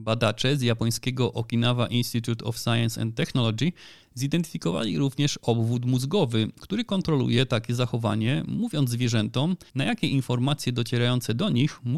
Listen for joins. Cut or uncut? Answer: cut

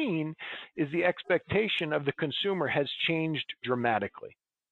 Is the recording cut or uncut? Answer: uncut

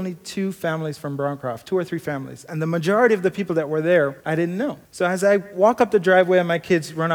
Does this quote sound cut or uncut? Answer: cut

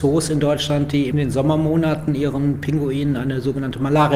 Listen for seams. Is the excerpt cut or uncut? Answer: uncut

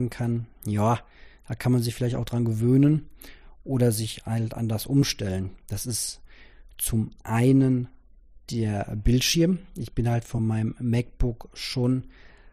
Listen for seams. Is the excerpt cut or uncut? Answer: uncut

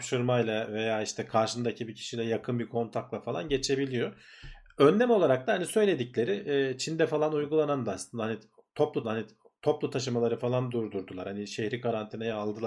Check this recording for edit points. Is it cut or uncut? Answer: cut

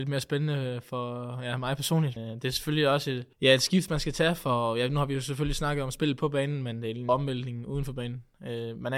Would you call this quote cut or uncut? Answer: cut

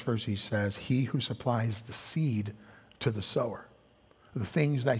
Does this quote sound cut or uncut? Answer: uncut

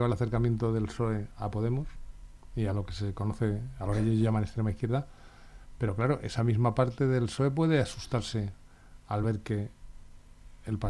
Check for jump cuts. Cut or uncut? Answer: uncut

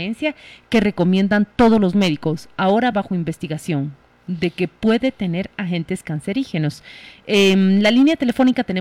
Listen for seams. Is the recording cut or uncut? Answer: uncut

